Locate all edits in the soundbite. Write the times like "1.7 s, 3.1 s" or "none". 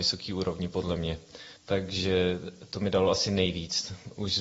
1.6 s